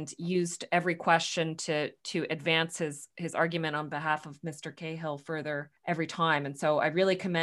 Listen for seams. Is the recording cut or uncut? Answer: cut